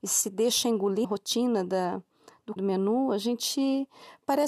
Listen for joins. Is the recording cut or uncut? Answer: cut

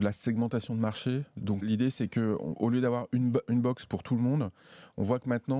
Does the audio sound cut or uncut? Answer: cut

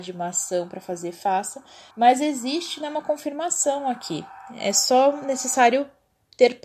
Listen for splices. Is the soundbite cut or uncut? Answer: cut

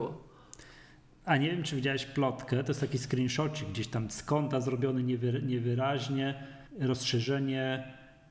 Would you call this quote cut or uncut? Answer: cut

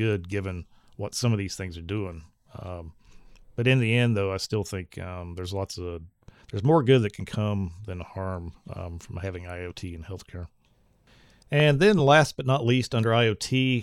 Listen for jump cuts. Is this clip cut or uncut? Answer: uncut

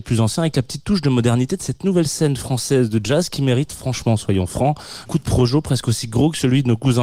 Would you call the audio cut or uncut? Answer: cut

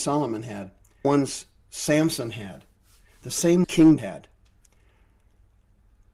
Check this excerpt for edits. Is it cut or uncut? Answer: cut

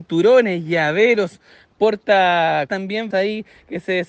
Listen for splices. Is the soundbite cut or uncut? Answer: cut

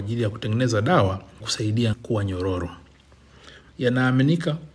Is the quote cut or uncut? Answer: cut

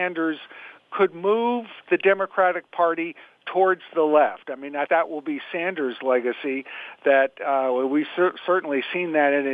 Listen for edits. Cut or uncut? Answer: cut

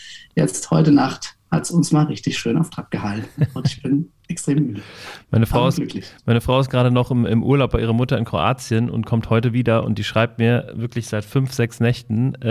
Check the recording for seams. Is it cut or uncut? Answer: uncut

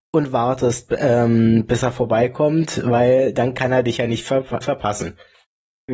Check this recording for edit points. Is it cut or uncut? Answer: cut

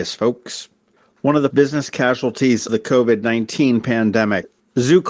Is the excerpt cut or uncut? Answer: cut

